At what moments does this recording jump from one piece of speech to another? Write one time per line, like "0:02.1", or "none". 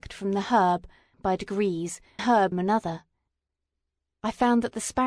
0:01.1
0:02.2
0:02.5